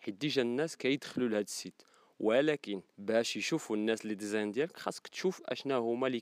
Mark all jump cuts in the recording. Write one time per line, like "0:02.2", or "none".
0:02.9